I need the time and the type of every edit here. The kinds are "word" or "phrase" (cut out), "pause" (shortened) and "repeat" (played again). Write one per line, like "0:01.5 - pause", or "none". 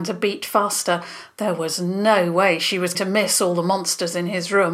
0:02.9 - word